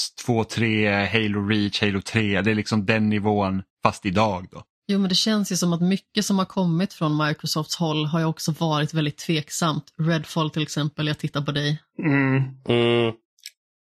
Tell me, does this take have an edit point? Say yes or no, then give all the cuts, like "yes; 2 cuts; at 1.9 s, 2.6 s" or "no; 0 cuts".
no; 0 cuts